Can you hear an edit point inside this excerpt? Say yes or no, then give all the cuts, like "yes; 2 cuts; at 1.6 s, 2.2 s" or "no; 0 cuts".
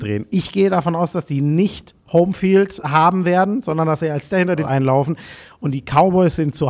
yes; 3 cuts; at 2.8 s, 4.3 s, 4.6 s